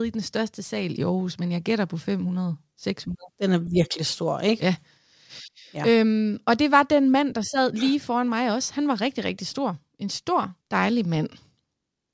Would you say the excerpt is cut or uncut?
cut